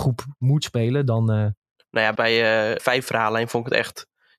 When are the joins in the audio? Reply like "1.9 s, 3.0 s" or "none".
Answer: 1.8 s, 2.2 s, 2.8 s